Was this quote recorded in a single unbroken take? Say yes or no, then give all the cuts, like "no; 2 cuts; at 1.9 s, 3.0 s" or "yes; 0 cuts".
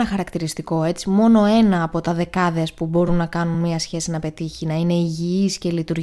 yes; 0 cuts